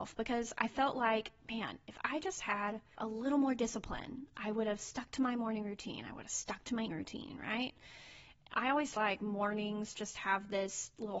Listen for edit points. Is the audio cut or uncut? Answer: cut